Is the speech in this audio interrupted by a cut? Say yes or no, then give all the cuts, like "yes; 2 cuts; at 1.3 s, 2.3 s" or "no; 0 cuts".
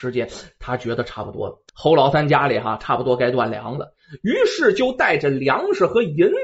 yes; 1 cut; at 1.7 s